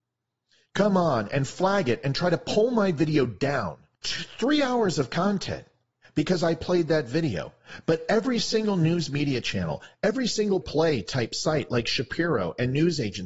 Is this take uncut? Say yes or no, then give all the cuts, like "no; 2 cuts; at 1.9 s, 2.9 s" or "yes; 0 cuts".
no; 3 cuts; at 4.0 s, 6.0 s, 10.6 s